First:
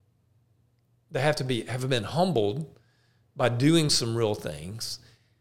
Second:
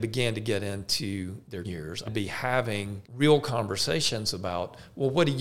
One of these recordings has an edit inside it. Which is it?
second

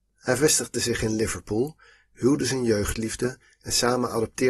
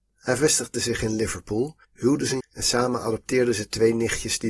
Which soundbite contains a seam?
second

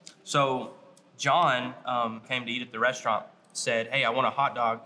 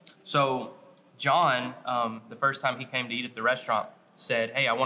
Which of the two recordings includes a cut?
first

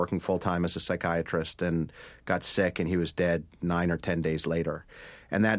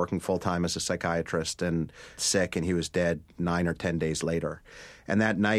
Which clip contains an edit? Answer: second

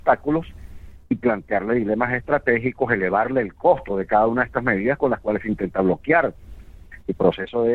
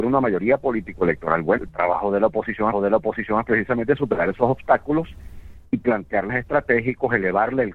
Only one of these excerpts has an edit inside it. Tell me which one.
second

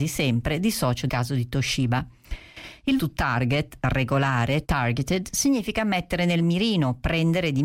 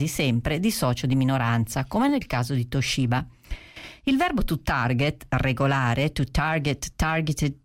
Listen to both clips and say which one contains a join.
first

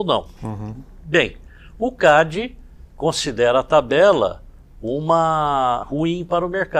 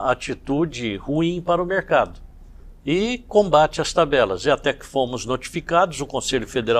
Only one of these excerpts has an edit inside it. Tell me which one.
first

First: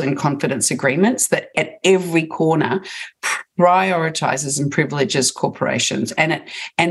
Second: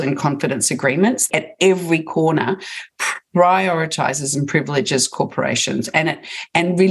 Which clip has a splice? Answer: second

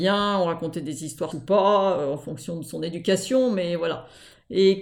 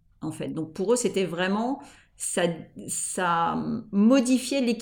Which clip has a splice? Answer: first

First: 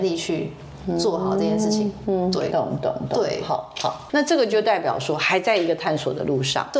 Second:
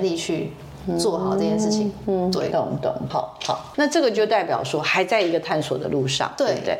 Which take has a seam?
second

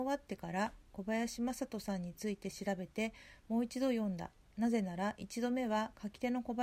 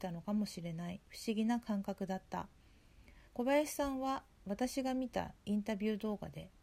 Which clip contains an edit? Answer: second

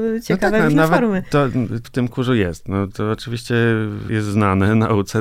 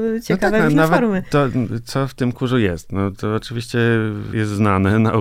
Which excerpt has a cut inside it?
first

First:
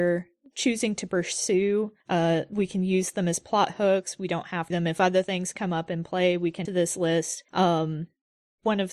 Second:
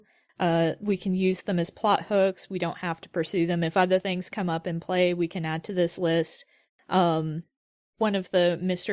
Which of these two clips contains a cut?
first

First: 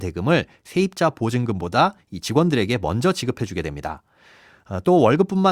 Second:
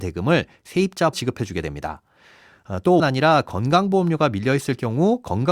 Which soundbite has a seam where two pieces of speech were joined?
second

